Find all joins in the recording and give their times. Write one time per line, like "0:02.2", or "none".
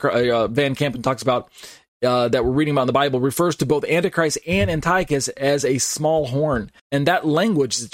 0:06.8